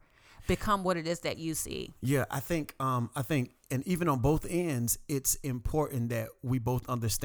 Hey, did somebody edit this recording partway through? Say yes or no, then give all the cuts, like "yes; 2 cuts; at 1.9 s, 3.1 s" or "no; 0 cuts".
no; 0 cuts